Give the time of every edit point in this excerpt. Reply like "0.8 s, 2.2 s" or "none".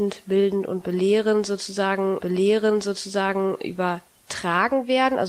2.2 s